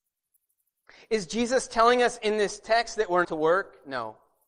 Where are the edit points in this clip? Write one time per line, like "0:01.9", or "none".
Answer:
0:03.2